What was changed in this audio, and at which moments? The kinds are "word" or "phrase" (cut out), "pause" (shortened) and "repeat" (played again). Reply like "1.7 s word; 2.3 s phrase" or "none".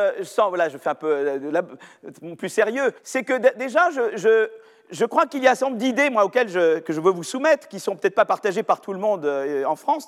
3.0 s pause